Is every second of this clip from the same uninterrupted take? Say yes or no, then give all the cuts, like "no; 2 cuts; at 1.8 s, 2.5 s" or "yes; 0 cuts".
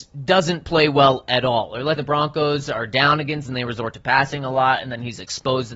no; 2 cuts; at 2.0 s, 3.5 s